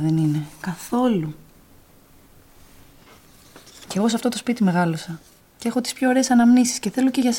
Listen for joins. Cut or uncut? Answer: uncut